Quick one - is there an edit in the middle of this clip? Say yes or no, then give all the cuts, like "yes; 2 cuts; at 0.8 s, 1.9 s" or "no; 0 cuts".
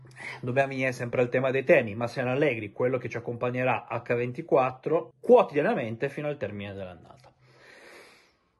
yes; 1 cut; at 5.1 s